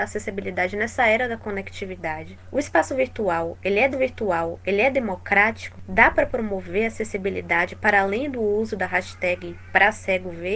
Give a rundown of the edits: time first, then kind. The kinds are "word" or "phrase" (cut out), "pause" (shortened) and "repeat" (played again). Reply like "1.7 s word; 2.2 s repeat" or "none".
3.9 s repeat